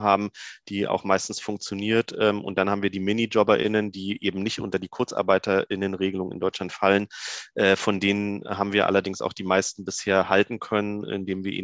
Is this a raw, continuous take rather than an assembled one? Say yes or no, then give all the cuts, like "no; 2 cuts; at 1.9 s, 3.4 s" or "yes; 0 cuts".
yes; 0 cuts